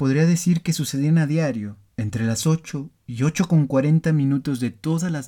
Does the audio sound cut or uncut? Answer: cut